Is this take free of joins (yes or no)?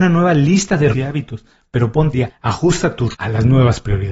no